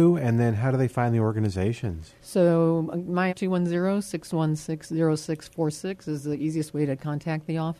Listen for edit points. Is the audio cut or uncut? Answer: cut